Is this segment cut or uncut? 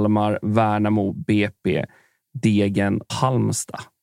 cut